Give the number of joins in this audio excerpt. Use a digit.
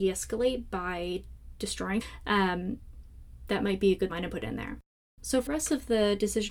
4